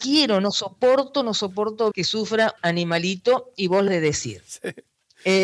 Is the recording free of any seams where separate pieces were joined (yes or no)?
no